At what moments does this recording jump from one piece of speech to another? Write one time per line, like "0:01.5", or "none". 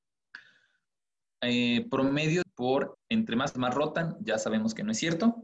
0:02.4
0:02.9
0:03.5